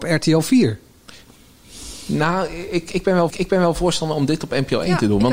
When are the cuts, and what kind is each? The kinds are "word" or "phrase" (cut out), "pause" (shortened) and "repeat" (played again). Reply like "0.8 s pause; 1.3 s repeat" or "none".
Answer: 3.3 s repeat